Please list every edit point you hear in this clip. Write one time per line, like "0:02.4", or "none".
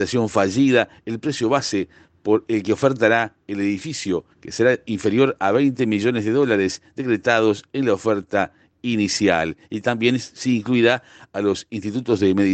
0:04.3